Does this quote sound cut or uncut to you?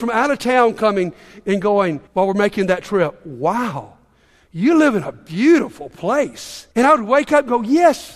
cut